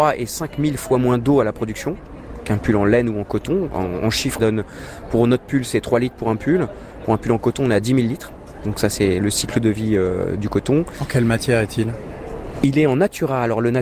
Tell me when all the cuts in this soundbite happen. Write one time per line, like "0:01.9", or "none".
0:04.4